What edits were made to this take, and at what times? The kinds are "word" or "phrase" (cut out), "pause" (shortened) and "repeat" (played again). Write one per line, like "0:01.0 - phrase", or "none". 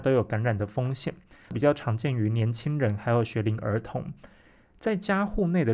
none